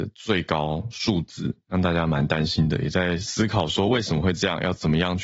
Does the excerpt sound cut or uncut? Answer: uncut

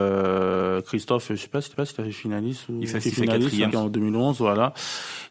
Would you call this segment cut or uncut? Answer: cut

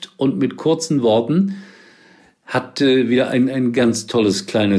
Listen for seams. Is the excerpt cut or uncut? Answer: uncut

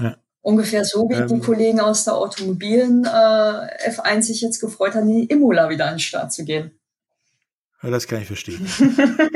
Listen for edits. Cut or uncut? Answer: uncut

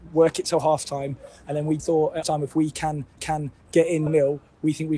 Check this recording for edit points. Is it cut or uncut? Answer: cut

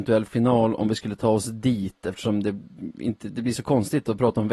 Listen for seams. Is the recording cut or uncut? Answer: uncut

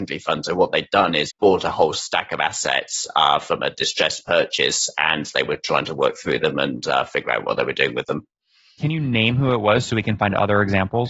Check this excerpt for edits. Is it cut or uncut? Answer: cut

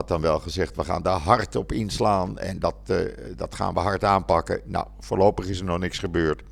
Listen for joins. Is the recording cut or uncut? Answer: uncut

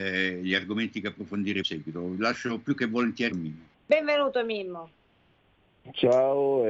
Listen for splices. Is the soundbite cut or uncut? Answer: cut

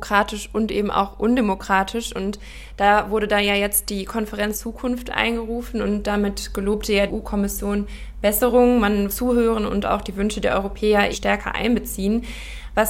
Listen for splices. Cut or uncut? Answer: cut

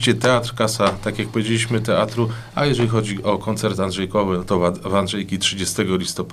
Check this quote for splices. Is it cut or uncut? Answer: uncut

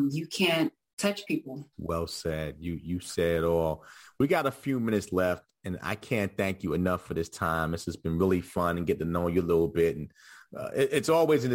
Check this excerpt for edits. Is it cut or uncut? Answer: cut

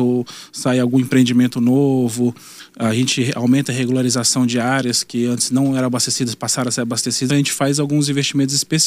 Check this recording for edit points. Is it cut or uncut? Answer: cut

